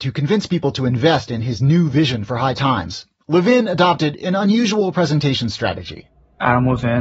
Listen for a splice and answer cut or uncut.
uncut